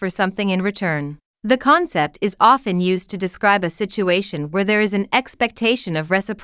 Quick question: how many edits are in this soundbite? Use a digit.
1